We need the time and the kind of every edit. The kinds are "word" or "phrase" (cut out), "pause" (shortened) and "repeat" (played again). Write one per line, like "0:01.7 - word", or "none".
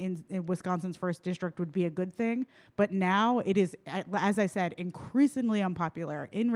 none

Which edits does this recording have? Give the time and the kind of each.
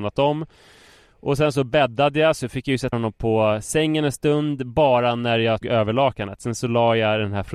0:02.9 - word
0:05.6 - word

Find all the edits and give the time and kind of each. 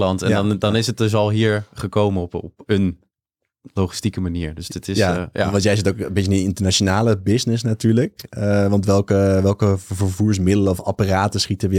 none

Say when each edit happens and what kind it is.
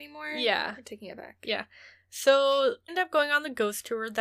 0:02.9 - word

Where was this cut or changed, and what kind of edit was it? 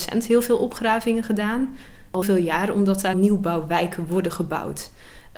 0:02.2 - word
0:03.1 - phrase

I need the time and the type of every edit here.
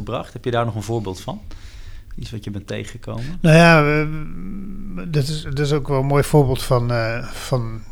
none

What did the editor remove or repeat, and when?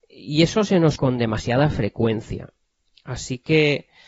0:01.0 - word

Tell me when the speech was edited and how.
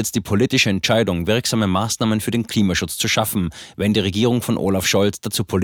none

